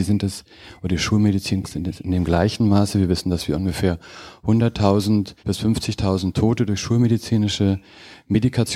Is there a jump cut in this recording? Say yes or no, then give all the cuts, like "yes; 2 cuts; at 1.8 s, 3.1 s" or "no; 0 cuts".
yes; 2 cuts; at 1.6 s, 5.4 s